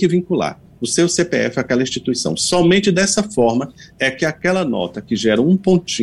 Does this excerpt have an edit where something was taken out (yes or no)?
no